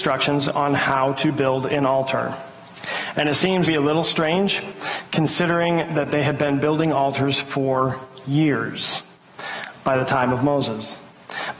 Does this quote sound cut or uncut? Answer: cut